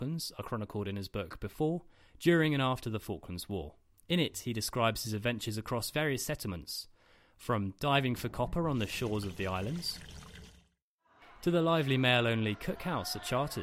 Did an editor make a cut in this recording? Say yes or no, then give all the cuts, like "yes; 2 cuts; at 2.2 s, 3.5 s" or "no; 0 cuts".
no; 0 cuts